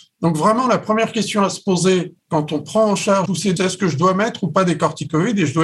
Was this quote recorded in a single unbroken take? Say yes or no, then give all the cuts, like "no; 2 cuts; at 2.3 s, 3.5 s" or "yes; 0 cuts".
no; 3 cuts; at 2.2 s, 3.3 s, 3.6 s